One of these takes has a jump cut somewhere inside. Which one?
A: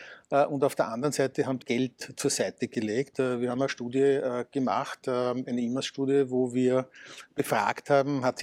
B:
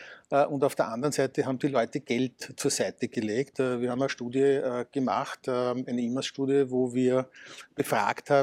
A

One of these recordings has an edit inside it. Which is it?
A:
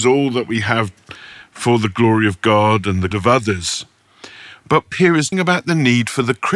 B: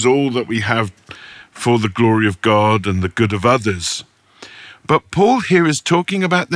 A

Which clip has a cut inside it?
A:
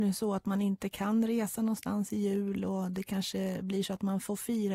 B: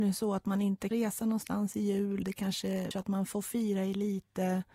B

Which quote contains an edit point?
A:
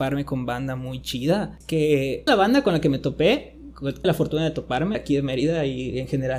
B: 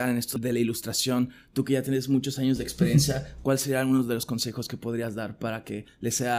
A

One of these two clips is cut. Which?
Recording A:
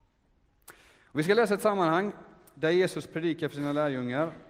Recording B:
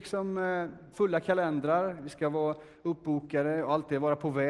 B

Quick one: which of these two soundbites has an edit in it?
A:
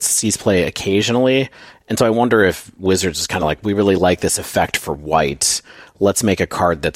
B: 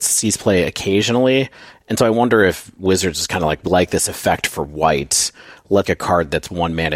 B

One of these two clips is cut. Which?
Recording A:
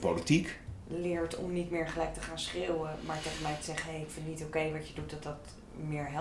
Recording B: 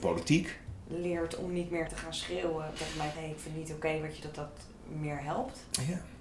B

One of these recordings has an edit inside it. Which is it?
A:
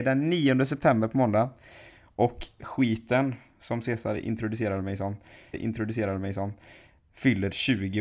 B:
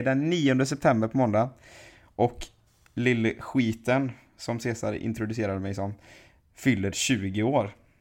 A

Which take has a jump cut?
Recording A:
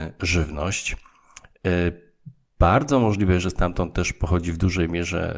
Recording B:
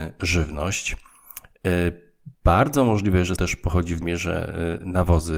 B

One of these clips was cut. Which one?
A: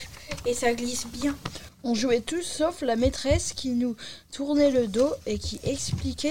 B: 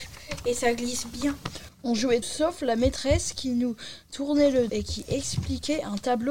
B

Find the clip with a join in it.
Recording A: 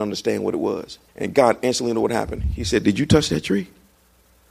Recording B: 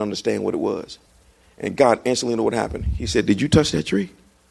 A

